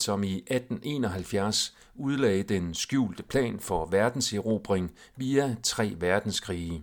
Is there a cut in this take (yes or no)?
no